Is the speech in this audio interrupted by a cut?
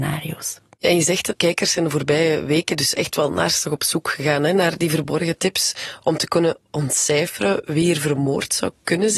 yes; 1 cut; at 1.3 s

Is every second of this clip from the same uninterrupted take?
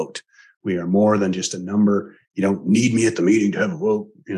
no; 1 cut; at 2.2 s

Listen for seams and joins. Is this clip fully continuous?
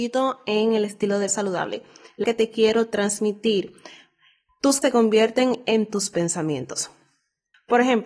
no; 3 cuts; at 1.3 s, 2.2 s, 4.8 s

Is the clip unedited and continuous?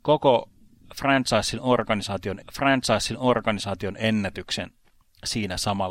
no; 1 cut; at 2.4 s

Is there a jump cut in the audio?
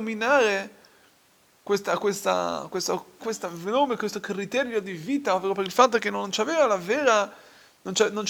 yes; 1 cut; at 3.2 s

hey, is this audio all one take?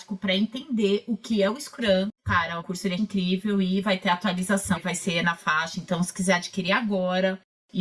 no; 4 cuts; at 2.2 s, 2.6 s, 3.0 s, 4.8 s

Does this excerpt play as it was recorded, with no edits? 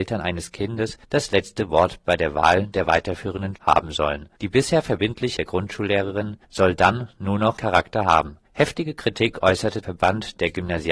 no; 8 cuts; at 1.0 s, 3.5 s, 4.3 s, 5.4 s, 6.4 s, 7.6 s, 8.4 s, 9.8 s

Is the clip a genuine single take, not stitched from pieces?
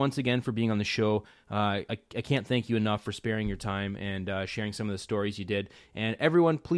yes; 0 cuts

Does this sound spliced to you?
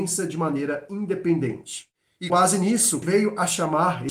yes; 2 cuts; at 2.3 s, 3.0 s

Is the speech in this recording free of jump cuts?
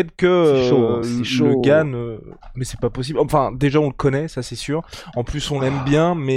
yes; 0 cuts

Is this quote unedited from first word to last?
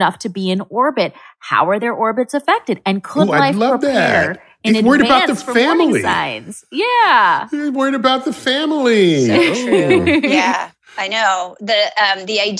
yes; 0 cuts

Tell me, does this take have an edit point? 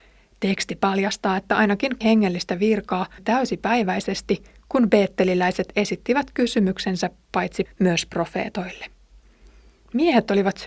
yes; 3 cuts; at 2.0 s, 3.2 s, 7.7 s

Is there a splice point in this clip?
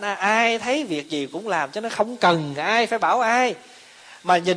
no; 0 cuts

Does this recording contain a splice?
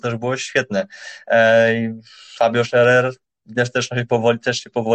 no; 0 cuts

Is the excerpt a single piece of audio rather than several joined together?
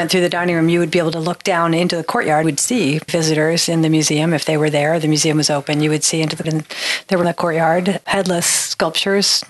no; 4 cuts; at 2.4 s, 3.1 s, 6.4 s, 7.2 s

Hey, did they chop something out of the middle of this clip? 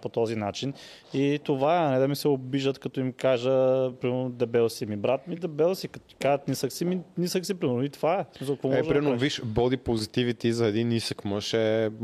no; 0 cuts

